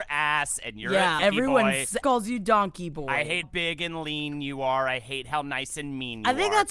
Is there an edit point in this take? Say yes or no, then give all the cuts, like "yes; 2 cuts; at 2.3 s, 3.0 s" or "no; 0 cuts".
yes; 3 cuts; at 1.2 s, 2.0 s, 3.4 s